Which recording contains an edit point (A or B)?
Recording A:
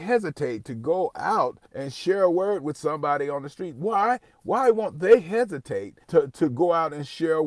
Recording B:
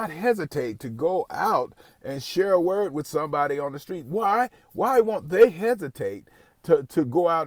A